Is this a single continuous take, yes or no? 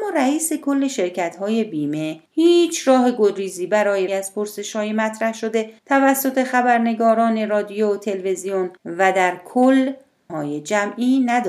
no